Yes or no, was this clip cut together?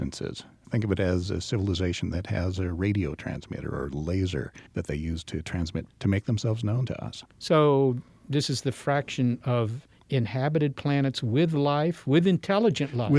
yes